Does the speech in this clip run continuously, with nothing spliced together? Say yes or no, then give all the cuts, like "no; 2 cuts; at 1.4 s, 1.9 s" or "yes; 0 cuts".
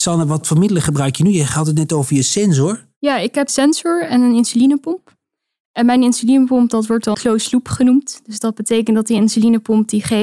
no; 2 cuts; at 3.5 s, 7.1 s